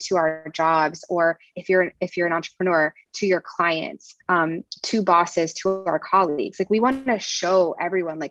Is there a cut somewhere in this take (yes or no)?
yes